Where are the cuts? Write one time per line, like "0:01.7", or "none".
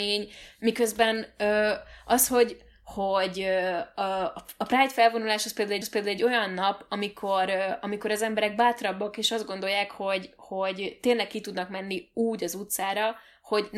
0:05.8